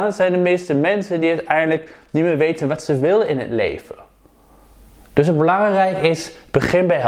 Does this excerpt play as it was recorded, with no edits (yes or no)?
yes